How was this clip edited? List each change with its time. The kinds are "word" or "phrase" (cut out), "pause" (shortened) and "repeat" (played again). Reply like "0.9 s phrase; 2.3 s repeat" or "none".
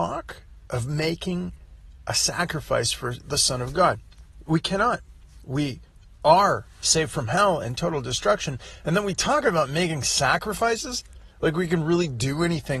none